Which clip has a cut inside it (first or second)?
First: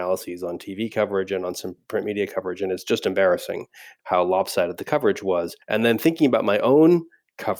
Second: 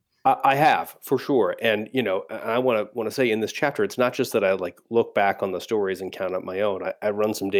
first